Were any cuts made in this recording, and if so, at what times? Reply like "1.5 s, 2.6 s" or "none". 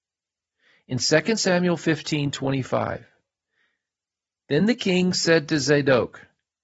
none